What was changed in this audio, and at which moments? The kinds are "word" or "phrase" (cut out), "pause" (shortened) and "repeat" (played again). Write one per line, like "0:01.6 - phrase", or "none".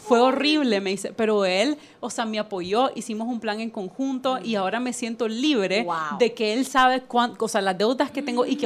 none